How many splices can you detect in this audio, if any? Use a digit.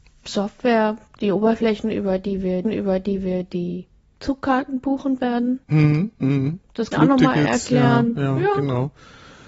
3